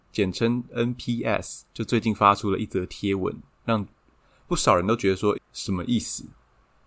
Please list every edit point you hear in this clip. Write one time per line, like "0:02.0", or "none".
0:05.3

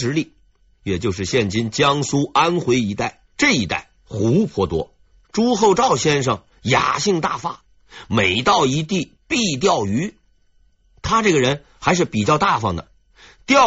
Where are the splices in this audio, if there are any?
0:03.3
0:05.0

